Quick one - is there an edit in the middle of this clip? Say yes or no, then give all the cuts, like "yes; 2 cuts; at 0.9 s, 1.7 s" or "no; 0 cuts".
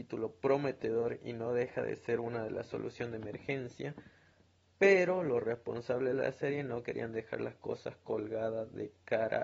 no; 0 cuts